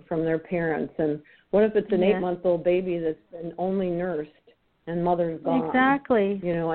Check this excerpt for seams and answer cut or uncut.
uncut